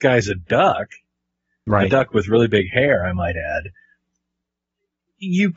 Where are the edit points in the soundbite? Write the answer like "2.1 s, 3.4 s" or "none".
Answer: none